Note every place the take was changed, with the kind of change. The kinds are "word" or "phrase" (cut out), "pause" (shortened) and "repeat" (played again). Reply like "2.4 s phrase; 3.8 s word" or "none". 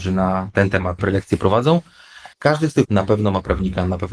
1.0 s word; 2.3 s pause; 2.9 s word